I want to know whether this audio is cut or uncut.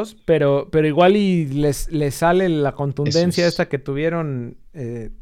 uncut